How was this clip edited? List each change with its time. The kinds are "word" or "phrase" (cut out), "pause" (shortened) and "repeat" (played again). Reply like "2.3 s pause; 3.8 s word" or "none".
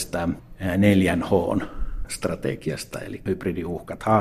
3.3 s word